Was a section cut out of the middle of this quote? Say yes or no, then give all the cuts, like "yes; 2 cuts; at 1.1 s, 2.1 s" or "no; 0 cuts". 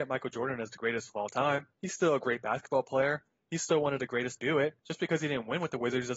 yes; 3 cuts; at 1.7 s, 4.4 s, 4.8 s